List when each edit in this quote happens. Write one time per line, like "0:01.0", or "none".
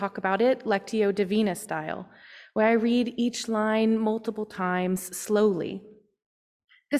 none